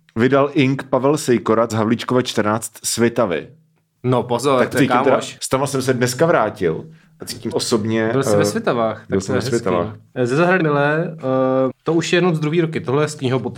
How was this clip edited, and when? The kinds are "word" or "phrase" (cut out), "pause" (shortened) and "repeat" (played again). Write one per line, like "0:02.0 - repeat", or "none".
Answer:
0:01.7 - word
0:04.7 - word
0:07.5 - word
0:10.6 - word
0:11.7 - word